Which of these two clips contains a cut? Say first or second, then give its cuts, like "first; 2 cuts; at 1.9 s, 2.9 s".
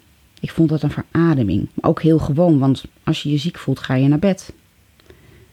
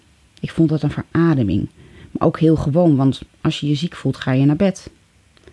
first; 1 cut; at 1.7 s